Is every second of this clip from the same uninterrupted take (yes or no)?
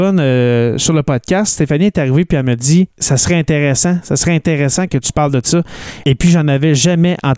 no